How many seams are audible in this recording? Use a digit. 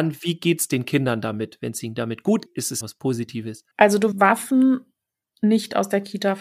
4